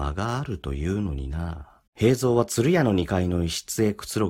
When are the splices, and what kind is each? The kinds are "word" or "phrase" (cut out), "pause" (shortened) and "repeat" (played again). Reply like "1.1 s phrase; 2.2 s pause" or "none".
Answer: 1.9 s pause